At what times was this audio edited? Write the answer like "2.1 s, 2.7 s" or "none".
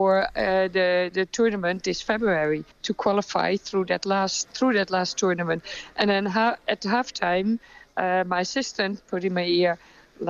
2.7 s, 4.4 s